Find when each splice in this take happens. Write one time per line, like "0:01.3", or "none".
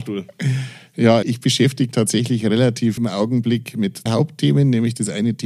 0:01.2
0:01.9
0:03.0
0:04.1